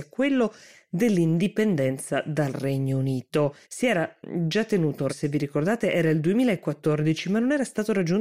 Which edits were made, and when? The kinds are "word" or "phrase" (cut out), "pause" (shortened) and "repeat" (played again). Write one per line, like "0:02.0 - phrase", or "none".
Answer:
0:03.6 - pause
0:05.1 - word